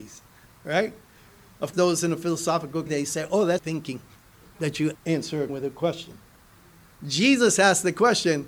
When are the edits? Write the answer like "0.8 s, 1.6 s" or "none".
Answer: 1.7 s, 2.9 s, 3.6 s, 4.9 s, 5.5 s